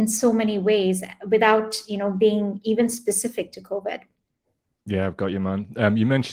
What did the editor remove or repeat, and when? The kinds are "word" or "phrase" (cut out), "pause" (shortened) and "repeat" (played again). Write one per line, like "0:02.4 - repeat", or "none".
none